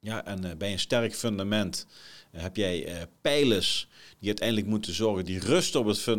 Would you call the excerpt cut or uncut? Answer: uncut